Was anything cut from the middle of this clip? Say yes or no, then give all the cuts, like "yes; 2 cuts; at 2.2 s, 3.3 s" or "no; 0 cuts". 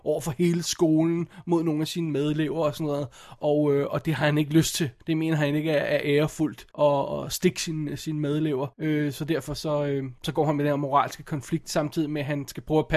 yes; 3 cuts; at 5.0 s, 6.7 s, 8.7 s